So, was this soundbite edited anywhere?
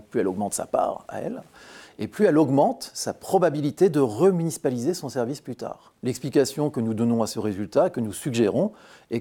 yes; 1 cut; at 6.0 s

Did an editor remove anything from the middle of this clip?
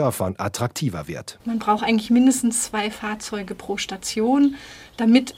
no; 0 cuts

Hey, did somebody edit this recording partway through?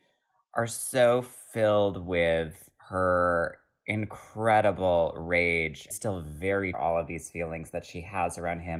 yes; 3 cuts; at 2.8 s, 5.9 s, 6.7 s

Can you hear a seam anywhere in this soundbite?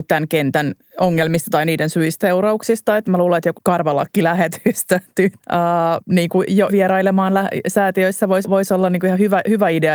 yes; 7 cuts; at 2.2 s, 3.0 s, 3.5 s, 5.4 s, 6.0 s, 6.7 s, 8.4 s

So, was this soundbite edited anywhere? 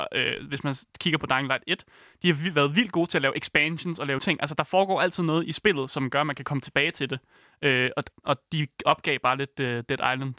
yes; 2 cuts; at 4.2 s, 8.1 s

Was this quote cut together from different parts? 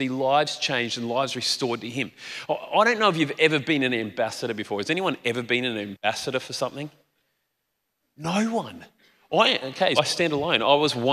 yes; 1 cut; at 10.0 s

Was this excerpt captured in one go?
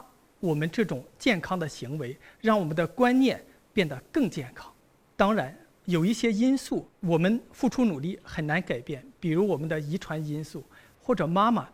yes; 0 cuts

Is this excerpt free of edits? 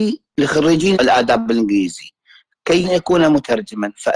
no; 2 cuts; at 0.9 s, 2.8 s

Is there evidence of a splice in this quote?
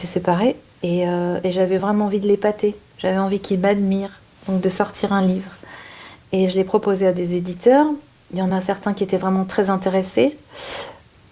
no; 0 cuts

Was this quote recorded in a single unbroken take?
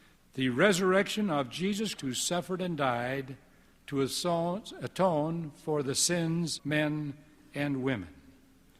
no; 2 cuts; at 2.0 s, 6.6 s

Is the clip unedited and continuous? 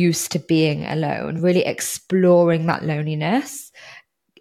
yes; 0 cuts

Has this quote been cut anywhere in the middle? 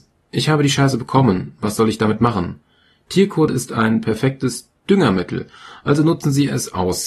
no; 0 cuts

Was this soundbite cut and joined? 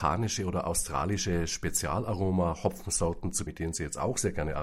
yes; 1 cut; at 3.5 s

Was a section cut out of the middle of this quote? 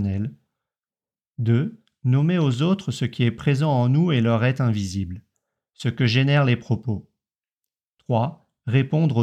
no; 0 cuts

